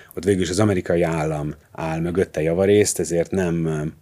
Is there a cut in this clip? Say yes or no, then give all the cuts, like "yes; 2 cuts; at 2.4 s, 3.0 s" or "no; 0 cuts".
yes; 1 cut; at 1.6 s